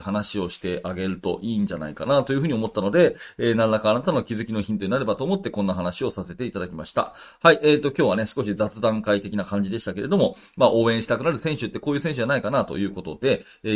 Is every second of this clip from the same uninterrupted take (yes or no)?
yes